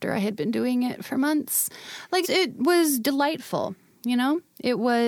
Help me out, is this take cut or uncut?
cut